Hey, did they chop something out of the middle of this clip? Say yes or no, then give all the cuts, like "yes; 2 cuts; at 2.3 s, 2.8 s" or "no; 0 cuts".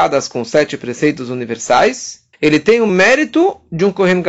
yes; 2 cuts; at 2.3 s, 2.9 s